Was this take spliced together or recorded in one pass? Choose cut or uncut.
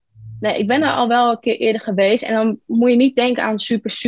uncut